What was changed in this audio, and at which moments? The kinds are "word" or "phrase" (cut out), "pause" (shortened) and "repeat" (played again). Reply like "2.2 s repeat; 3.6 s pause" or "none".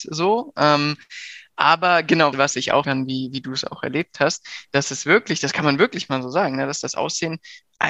2.3 s word; 2.8 s phrase